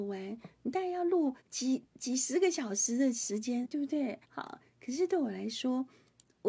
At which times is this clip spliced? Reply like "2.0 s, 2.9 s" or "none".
1.4 s, 3.6 s, 4.2 s